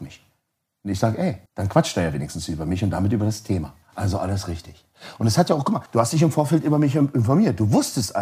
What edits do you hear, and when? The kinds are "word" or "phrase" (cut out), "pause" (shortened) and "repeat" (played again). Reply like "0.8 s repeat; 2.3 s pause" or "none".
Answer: 1.5 s pause; 3.8 s pause; 5.9 s pause